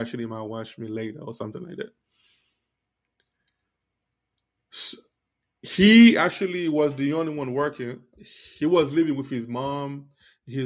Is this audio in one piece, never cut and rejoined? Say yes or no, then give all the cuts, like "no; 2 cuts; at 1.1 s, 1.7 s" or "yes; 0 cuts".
no; 1 cut; at 5.2 s